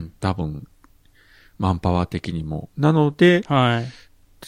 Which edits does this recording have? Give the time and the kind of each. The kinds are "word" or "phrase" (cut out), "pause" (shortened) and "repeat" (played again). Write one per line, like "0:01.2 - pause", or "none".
0:02.7 - pause